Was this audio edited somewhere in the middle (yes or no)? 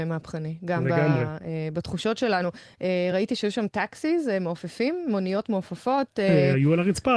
no